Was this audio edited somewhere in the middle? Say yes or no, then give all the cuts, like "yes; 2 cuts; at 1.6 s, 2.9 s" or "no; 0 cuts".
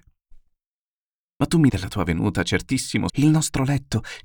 yes; 2 cuts; at 1.7 s, 3.1 s